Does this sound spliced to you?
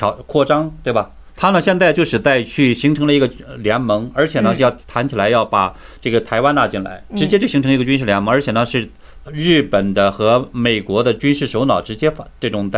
yes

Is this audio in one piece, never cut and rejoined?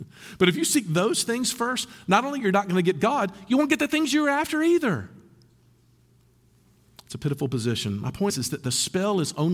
no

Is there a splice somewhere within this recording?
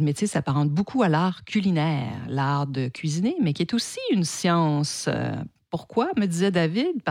no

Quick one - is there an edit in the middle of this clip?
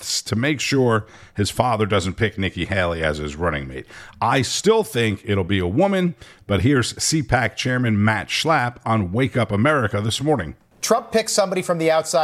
no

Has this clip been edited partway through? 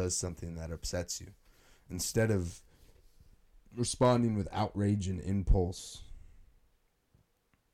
no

